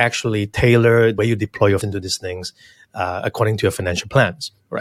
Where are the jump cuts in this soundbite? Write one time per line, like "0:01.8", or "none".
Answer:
0:01.2
0:01.8